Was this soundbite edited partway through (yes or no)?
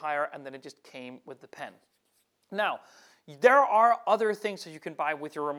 no